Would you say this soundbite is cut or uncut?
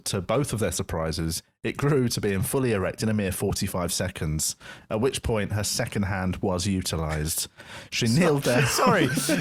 uncut